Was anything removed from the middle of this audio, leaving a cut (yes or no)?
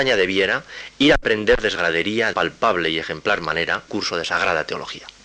yes